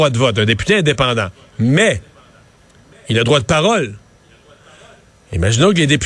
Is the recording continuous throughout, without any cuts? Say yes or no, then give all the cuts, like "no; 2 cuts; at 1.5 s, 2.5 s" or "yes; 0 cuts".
yes; 0 cuts